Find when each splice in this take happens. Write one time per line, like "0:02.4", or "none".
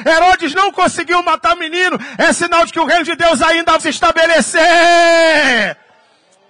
0:03.8